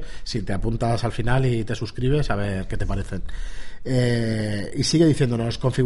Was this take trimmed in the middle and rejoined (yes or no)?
no